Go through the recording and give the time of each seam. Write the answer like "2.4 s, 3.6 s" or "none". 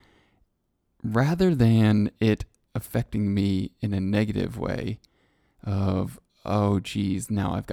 none